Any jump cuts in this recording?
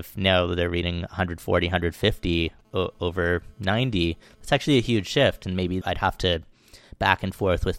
yes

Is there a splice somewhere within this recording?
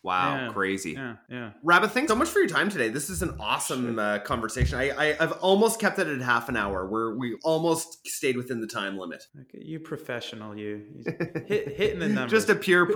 yes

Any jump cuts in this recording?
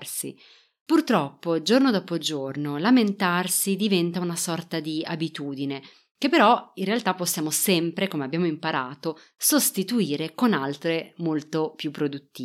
no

